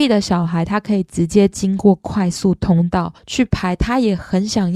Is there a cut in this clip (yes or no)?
yes